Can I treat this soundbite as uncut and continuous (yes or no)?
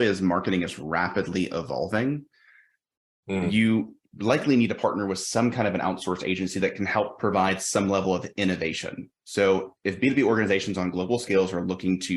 yes